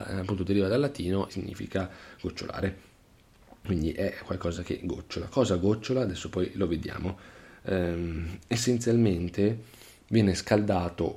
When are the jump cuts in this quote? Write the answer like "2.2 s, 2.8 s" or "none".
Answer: 1.3 s